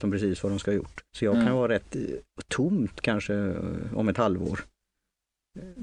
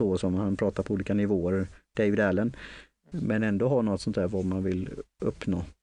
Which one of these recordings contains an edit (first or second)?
first